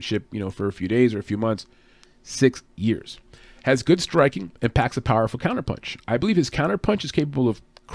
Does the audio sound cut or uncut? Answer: uncut